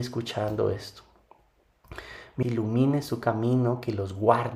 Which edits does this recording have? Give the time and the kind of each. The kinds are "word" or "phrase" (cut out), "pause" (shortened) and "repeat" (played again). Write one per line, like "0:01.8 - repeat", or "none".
0:02.4 - phrase